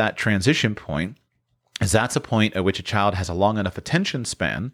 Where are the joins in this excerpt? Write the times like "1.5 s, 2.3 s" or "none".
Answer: none